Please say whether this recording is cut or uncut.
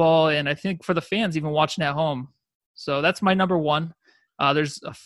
uncut